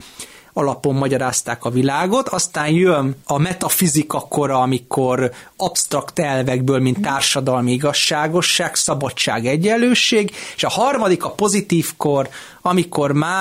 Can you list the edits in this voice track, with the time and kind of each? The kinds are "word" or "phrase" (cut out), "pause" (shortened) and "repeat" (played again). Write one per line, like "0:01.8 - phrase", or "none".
0:03.2 - pause